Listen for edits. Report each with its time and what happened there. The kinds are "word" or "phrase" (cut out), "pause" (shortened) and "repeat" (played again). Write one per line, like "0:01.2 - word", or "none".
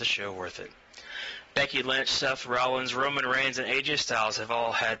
none